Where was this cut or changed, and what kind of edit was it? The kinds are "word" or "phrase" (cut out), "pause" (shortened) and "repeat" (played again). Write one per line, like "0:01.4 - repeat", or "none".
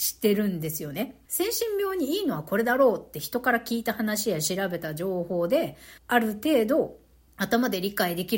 0:01.3 - pause
0:06.0 - pause
0:07.3 - pause